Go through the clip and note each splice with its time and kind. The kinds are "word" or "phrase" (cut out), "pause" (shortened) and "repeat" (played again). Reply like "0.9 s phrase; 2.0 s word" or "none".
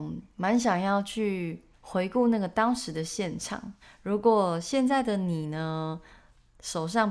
1.7 s pause; 3.8 s pause